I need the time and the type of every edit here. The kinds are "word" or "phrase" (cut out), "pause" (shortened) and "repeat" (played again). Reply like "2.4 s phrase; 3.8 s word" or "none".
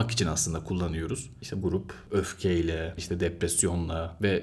1.6 s word; 3.0 s word